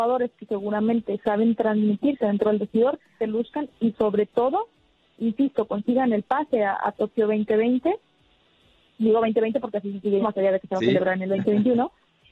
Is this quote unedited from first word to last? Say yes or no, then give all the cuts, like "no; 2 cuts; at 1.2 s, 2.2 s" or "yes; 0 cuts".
no; 3 cuts; at 3.2 s, 3.9 s, 10.2 s